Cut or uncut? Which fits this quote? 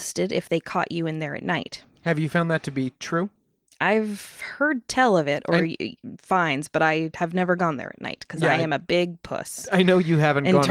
uncut